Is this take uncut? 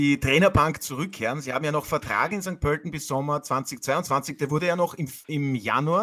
yes; 0 cuts

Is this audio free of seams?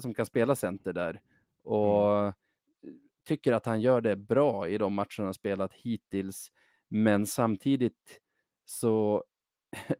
yes; 0 cuts

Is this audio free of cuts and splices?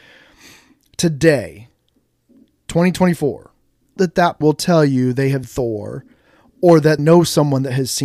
no; 4 cuts; at 4.0 s, 4.4 s, 5.4 s, 7.0 s

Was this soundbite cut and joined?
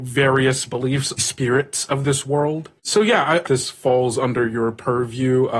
yes; 3 cuts; at 1.2 s, 2.8 s, 3.5 s

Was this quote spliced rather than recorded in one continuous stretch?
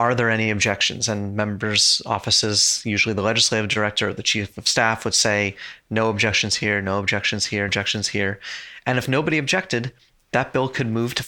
yes; 1 cut; at 7.7 s

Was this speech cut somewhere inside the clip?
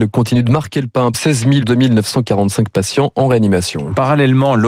yes; 2 cuts; at 1.1 s, 1.6 s

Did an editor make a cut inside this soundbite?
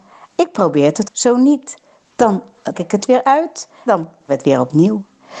yes; 4 cuts; at 1.0 s, 2.7 s, 3.9 s, 4.3 s

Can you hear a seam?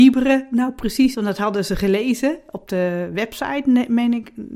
yes; 1 cut; at 1.1 s

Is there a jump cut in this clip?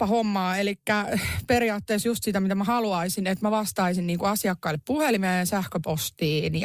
no; 0 cuts

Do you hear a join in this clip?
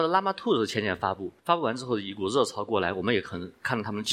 yes; 1 cut; at 1.4 s

